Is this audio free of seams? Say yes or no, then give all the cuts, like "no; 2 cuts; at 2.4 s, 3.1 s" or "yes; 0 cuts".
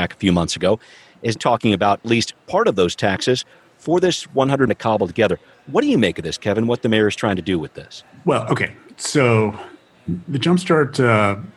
no; 3 cuts; at 1.4 s, 2.0 s, 4.7 s